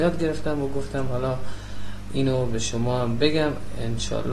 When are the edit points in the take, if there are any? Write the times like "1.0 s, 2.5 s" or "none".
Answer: none